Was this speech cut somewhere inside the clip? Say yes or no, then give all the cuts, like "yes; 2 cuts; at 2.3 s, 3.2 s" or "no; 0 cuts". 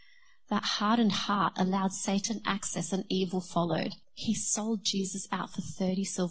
yes; 1 cut; at 4.0 s